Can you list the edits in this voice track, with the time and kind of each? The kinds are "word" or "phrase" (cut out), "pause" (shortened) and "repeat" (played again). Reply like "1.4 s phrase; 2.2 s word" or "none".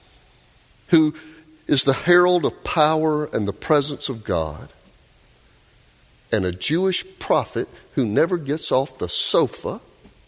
none